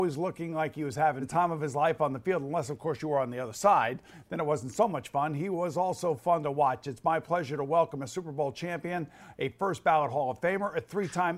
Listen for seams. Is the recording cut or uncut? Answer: uncut